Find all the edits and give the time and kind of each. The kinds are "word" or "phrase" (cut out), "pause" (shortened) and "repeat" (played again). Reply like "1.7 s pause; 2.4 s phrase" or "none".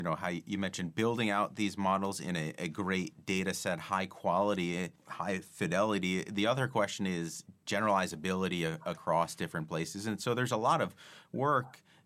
5.0 s pause